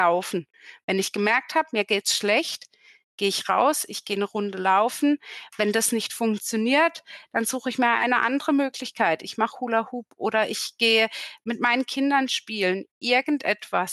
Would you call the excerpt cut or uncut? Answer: uncut